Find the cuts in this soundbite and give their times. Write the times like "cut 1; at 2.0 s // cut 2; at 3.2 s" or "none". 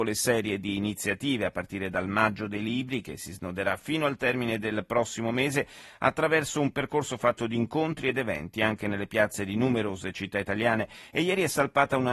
none

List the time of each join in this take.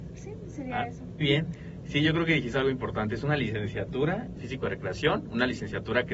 cut 1; at 1.2 s // cut 2; at 4.4 s

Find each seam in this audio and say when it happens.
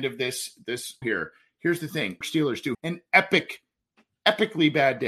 cut 1; at 1.0 s // cut 2; at 2.2 s // cut 3; at 2.7 s

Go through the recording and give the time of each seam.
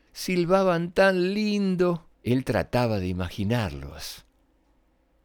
cut 1; at 2.1 s

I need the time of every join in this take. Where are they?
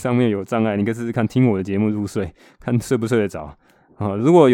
none

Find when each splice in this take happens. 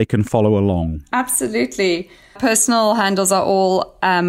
cut 1; at 2.4 s

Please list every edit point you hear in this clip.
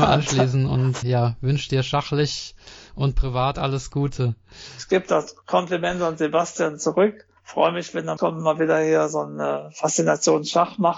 cut 1; at 1.0 s // cut 2; at 7.4 s // cut 3; at 8.2 s

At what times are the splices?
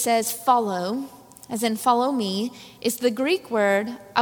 none

